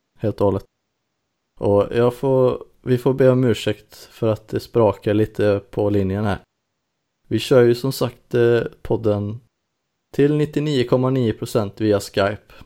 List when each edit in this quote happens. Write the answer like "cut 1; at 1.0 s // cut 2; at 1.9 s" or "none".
none